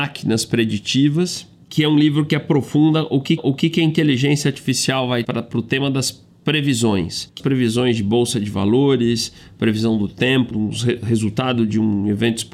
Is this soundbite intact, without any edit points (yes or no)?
no